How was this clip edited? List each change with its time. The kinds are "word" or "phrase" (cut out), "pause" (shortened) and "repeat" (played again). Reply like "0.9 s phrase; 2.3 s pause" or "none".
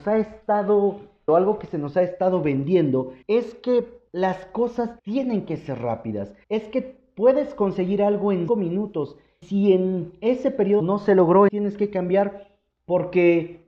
1.3 s word; 3.2 s pause; 4.1 s pause; 5.0 s pause; 6.4 s pause; 8.5 s phrase; 9.4 s word; 10.8 s phrase; 11.5 s word